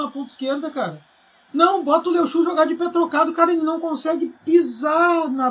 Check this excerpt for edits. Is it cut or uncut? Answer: uncut